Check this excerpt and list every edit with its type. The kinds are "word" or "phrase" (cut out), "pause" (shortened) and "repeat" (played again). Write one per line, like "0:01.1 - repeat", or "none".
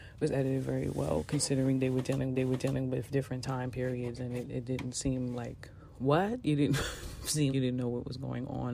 0:02.3 - repeat
0:07.5 - word